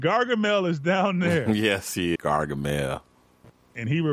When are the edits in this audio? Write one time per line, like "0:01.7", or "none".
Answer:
0:02.2